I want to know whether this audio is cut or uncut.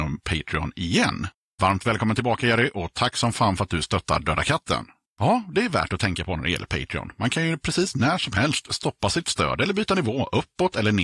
uncut